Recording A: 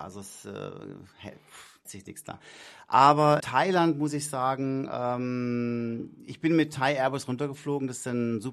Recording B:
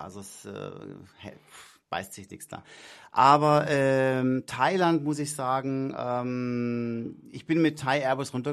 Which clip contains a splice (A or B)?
A